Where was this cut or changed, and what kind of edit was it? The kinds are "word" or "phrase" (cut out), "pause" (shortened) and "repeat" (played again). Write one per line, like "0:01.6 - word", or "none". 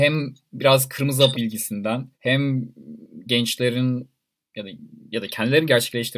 0:01.3 - word
0:02.1 - pause